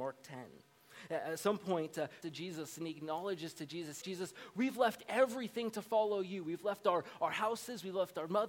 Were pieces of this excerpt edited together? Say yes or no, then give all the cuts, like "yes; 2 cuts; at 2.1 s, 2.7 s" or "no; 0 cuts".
yes; 2 cuts; at 2.2 s, 4.0 s